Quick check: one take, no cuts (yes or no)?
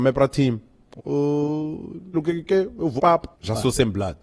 no